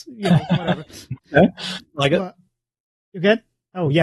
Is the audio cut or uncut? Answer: cut